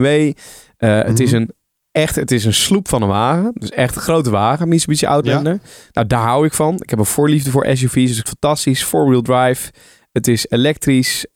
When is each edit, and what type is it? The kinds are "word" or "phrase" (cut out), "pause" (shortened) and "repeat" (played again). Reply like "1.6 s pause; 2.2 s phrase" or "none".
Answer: 8.2 s word

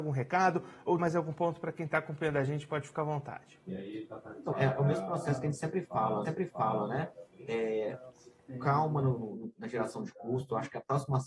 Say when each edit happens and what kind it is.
1.0 s word; 4.5 s word; 6.2 s repeat; 9.2 s word

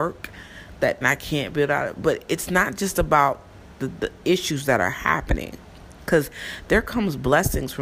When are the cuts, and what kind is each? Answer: 1.0 s phrase

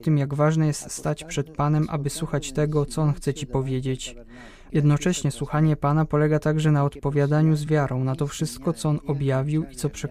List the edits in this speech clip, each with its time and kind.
none

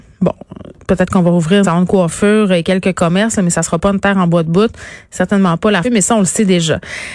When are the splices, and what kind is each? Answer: 1.6 s word; 5.8 s phrase

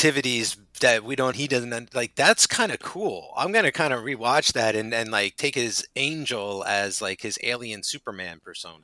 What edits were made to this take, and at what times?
1.3 s phrase

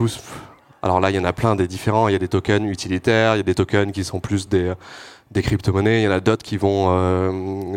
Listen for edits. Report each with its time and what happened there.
none

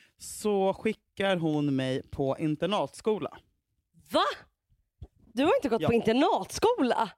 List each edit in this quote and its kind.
none

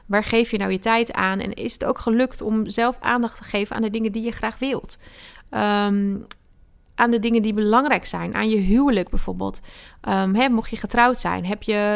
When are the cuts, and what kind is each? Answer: none

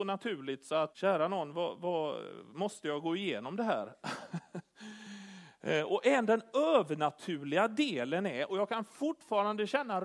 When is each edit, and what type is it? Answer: 0.9 s word

